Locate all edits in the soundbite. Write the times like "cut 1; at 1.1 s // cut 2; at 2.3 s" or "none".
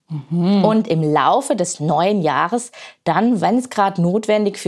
none